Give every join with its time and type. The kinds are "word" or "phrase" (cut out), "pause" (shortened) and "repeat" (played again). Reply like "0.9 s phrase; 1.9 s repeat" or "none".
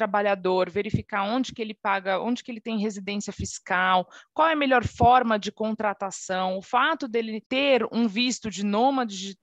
7.4 s pause